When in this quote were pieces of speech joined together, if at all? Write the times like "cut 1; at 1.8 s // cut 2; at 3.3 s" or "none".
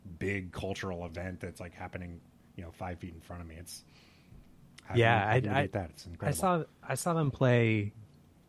none